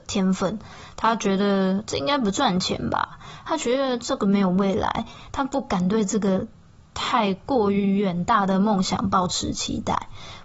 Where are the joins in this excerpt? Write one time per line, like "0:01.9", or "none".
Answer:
none